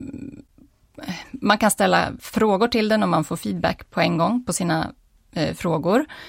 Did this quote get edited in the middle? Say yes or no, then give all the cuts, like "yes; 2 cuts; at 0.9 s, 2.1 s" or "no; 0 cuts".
no; 0 cuts